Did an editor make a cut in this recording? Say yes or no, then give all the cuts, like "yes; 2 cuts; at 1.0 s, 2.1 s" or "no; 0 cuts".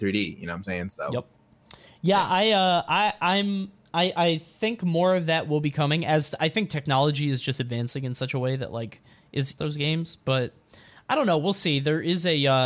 yes; 1 cut; at 9.6 s